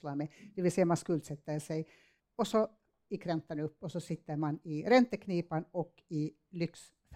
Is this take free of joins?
no; 1 cut; at 2.2 s

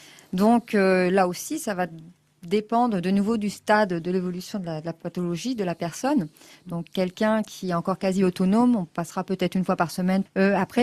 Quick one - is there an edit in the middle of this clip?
no; 0 cuts

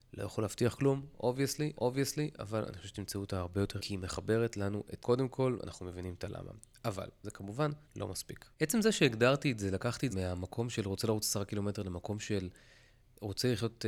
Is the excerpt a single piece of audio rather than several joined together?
no; 6 cuts; at 1.7 s, 3.8 s, 5.0 s, 7.8 s, 8.5 s, 10.1 s

